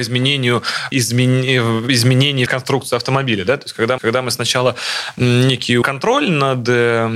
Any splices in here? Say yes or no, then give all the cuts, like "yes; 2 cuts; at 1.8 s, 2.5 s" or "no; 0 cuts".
yes; 4 cuts; at 0.9 s, 2.5 s, 4.0 s, 5.8 s